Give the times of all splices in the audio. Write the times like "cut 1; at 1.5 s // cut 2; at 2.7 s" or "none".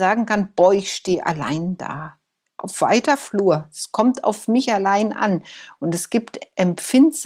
none